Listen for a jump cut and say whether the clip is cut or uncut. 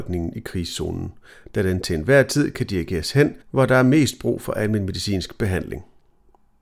cut